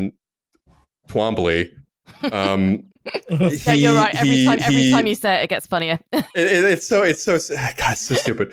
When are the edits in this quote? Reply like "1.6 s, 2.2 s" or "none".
2.9 s, 4.6 s, 6.3 s